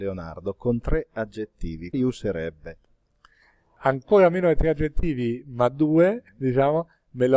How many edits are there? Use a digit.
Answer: 2